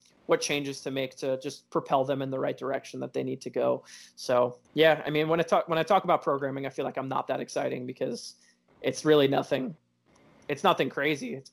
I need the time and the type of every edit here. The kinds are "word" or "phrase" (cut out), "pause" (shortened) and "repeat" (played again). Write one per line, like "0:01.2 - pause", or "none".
0:04.6 - pause